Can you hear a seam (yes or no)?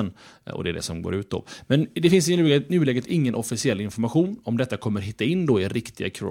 no